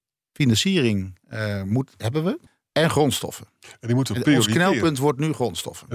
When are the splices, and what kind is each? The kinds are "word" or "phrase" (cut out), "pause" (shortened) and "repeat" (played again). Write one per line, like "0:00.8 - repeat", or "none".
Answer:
0:01.2 - pause
0:02.5 - pause